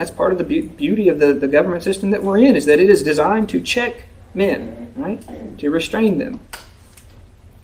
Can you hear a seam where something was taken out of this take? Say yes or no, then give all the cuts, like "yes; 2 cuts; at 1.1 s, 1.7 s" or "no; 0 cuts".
no; 0 cuts